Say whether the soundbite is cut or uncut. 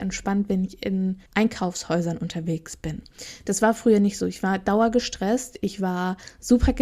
cut